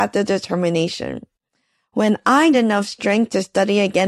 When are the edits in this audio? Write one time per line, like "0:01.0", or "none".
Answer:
0:02.5

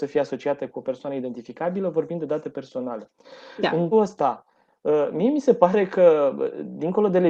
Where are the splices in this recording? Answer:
0:03.9

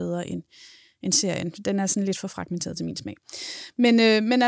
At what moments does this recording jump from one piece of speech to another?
none

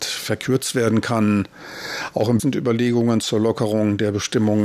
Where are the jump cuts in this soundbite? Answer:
0:02.4

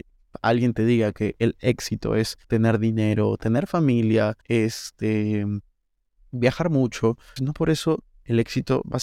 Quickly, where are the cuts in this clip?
0:02.4
0:04.4
0:07.4

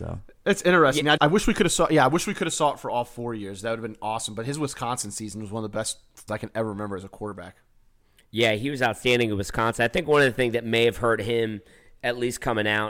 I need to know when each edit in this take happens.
0:01.2
0:06.3

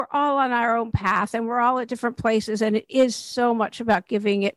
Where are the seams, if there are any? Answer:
none

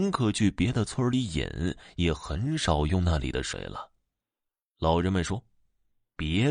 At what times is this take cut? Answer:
none

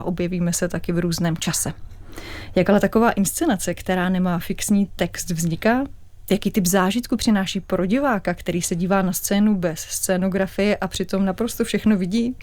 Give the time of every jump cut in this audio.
none

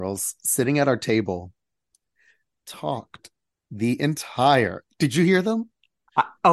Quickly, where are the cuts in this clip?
none

